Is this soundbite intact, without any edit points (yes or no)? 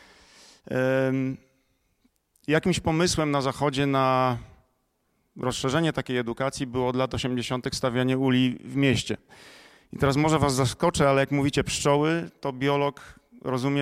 yes